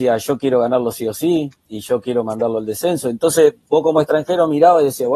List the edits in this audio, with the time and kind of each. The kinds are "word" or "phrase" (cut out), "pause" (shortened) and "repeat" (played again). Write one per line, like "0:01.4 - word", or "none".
none